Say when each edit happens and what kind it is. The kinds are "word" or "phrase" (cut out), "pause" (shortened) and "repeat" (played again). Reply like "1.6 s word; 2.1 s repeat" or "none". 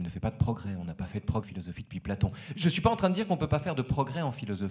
1.4 s word